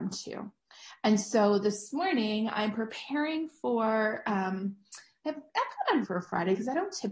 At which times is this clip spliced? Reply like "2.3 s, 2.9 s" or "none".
6.0 s